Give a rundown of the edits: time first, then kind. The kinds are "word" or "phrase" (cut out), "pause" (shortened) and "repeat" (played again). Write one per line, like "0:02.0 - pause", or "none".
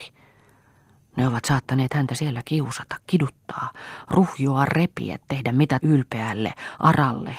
0:05.8 - phrase